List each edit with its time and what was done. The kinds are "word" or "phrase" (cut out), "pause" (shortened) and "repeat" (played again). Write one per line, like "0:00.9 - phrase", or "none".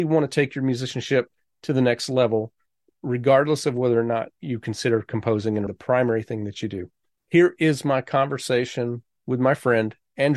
0:05.7 - word